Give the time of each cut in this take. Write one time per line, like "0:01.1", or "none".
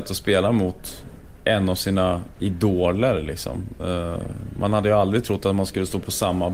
0:01.3